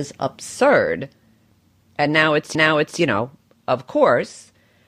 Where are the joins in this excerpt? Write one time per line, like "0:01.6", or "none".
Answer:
0:02.5